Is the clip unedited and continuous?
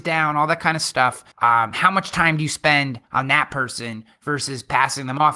no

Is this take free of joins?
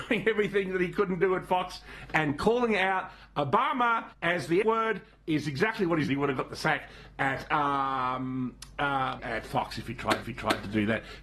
no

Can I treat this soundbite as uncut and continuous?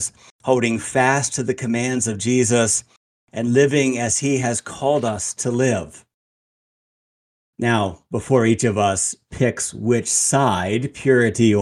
yes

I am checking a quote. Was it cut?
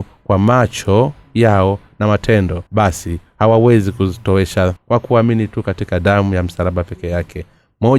yes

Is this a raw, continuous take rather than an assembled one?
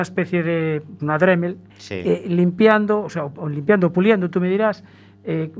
no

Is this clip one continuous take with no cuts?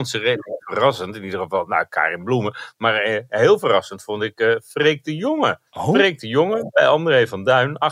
no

